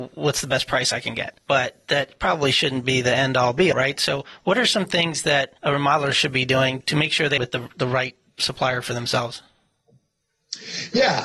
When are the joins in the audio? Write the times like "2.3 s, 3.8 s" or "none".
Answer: 1.4 s, 3.7 s, 5.6 s, 6.8 s, 7.4 s